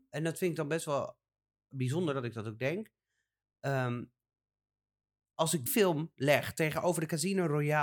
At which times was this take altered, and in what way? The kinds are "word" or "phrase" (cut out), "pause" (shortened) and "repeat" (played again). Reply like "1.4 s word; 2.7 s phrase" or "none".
5.7 s word

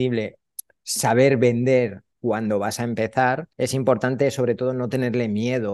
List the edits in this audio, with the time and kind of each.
3.5 s pause

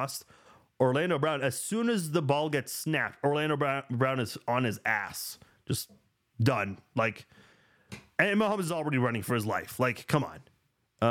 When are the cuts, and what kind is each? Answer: none

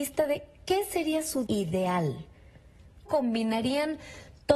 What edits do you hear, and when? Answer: 1.5 s word; 3.1 s word

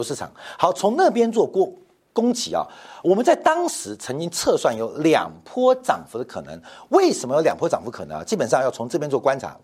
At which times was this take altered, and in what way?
none

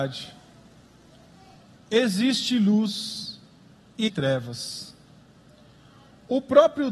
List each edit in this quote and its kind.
4.1 s word

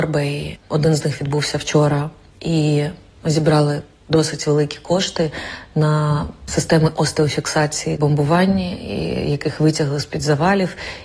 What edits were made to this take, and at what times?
8.0 s phrase

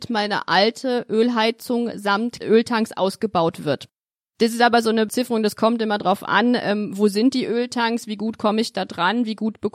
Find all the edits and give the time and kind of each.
none

